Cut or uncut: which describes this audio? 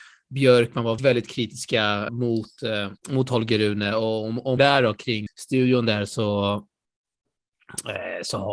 cut